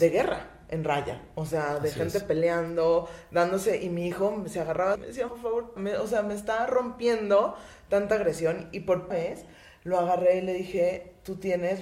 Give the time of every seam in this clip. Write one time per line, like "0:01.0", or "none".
0:05.0
0:05.3
0:05.8
0:09.1

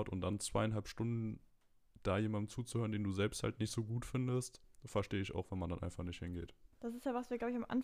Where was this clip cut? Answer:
0:06.7

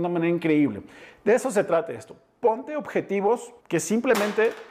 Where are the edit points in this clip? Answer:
0:03.6

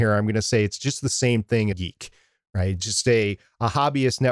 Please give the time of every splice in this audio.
0:01.7

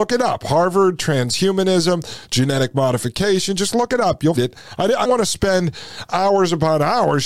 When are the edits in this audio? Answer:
0:04.4
0:05.0

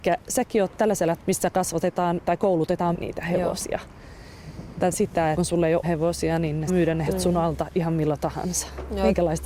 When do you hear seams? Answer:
0:01.2
0:02.2
0:02.9
0:04.9
0:05.3
0:05.8
0:06.7
0:07.1

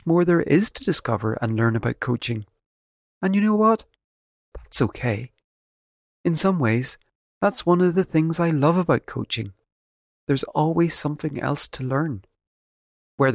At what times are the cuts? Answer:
none

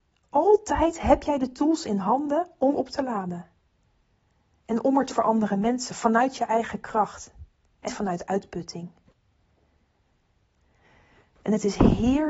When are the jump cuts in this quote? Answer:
0:02.7
0:05.1
0:07.9

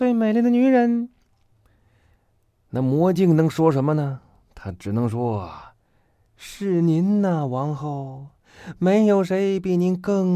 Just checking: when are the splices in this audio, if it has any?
none

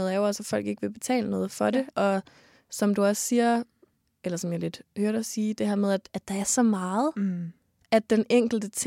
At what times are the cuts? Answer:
none

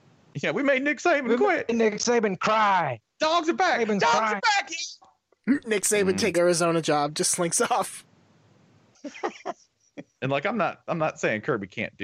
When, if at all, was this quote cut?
0:03.1
0:06.3

